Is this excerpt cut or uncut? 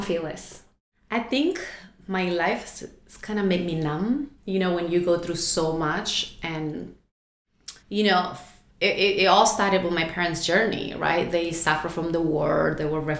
cut